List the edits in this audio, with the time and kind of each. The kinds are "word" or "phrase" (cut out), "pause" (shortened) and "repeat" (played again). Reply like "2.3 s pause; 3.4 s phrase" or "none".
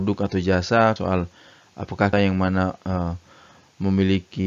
1.0 s phrase; 2.1 s phrase